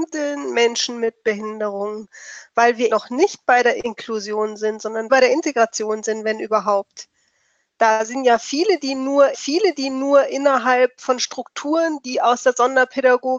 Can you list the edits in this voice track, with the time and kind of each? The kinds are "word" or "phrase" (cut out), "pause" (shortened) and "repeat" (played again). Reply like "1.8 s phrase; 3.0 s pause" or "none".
2.9 s word; 5.1 s phrase; 9.3 s repeat